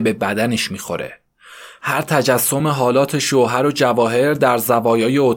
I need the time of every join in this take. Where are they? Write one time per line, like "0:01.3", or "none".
none